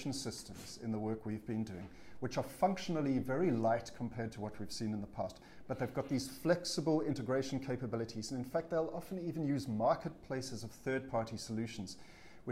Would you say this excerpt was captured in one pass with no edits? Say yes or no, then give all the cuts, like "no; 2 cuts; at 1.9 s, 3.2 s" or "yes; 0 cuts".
yes; 0 cuts